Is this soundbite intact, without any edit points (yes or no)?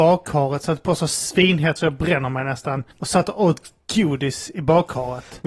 no